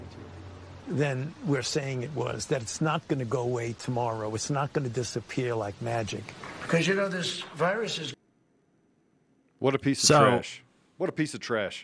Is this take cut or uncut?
uncut